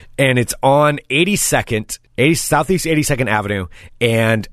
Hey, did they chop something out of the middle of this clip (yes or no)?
yes